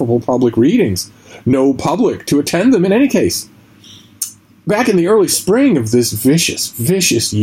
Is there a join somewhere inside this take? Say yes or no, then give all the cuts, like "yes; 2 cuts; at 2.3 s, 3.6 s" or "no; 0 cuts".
no; 0 cuts